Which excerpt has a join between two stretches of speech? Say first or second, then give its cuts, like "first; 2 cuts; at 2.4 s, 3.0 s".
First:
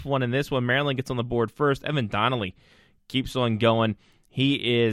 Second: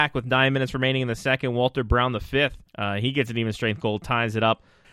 second; 1 cut; at 2.7 s